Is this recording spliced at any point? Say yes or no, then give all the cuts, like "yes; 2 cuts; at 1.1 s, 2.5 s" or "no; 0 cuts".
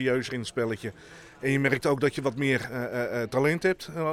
no; 0 cuts